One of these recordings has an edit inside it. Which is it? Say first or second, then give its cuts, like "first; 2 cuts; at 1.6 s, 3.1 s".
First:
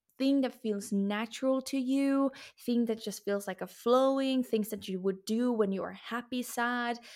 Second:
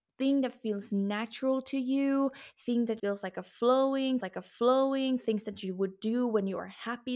second; 2 cuts; at 3.0 s, 4.2 s